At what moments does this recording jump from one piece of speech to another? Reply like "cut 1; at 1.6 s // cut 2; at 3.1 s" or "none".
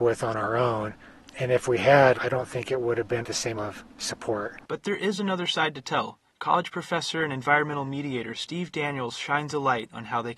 cut 1; at 1.2 s // cut 2; at 2.1 s // cut 3; at 3.2 s // cut 4; at 3.6 s // cut 5; at 6.3 s